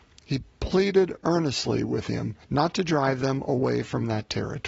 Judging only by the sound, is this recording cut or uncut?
cut